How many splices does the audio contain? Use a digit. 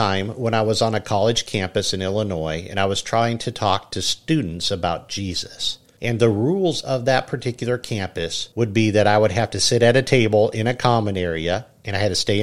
0